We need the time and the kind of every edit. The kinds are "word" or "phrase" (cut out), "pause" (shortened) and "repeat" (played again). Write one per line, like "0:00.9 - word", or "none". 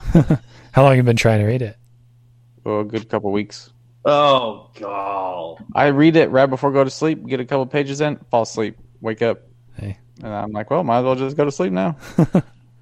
none